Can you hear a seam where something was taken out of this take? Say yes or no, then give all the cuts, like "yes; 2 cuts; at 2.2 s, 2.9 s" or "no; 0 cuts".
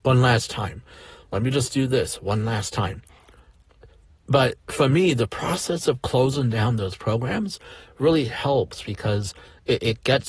no; 0 cuts